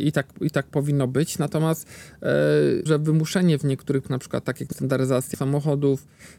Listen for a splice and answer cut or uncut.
cut